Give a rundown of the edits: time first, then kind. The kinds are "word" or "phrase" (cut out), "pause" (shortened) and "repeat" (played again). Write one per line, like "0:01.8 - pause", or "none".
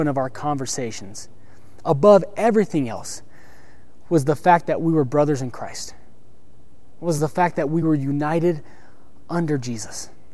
none